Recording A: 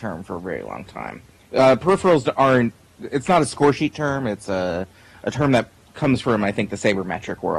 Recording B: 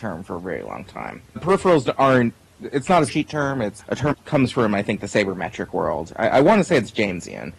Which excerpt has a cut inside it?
B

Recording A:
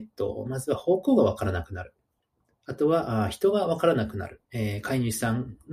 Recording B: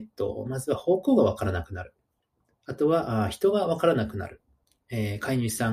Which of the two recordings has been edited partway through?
A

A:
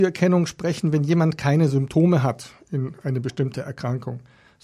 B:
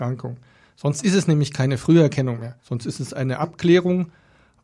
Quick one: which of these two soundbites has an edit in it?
B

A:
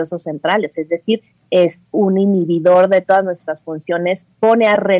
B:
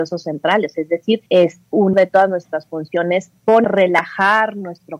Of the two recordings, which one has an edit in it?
B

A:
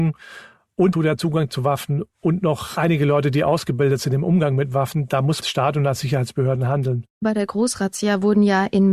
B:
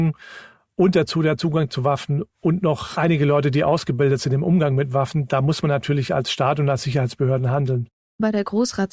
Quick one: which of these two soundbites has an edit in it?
A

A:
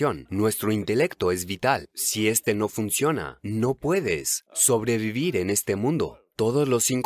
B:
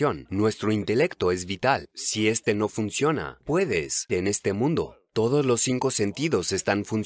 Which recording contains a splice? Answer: B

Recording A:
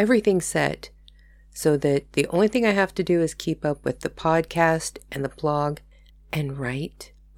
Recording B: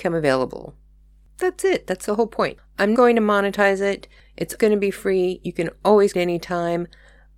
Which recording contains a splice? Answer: B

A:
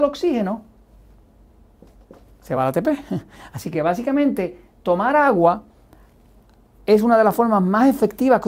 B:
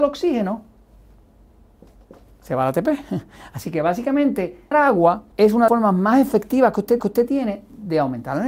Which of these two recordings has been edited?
B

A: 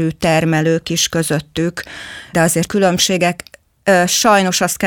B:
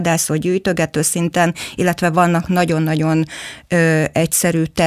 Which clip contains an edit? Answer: A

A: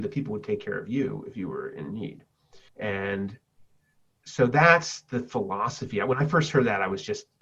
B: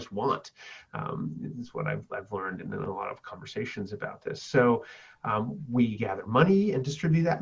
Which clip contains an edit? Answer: A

